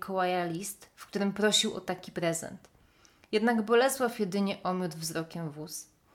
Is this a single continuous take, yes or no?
yes